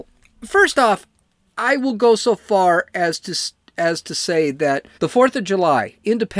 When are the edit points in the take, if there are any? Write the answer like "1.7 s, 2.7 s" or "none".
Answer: 4.9 s